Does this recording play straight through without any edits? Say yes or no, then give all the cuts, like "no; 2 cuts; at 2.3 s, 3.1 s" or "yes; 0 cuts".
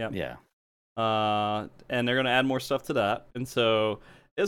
no; 1 cut; at 3.3 s